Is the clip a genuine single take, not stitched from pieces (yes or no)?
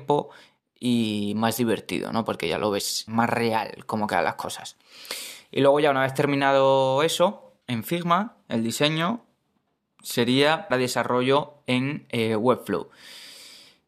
no